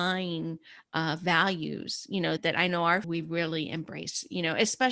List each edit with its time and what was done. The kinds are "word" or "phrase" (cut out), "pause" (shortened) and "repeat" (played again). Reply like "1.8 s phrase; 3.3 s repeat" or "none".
2.4 s word; 3.0 s word